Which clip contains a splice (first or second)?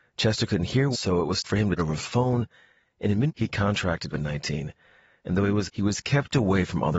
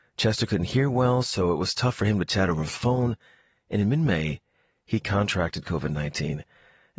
first